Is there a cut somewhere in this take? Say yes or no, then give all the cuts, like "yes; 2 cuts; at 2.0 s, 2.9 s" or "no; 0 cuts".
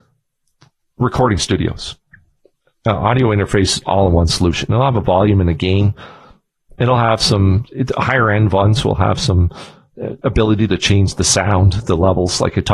no; 0 cuts